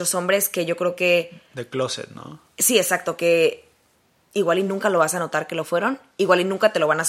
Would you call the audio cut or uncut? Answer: uncut